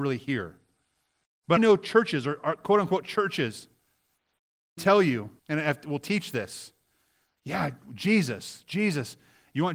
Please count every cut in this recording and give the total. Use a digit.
3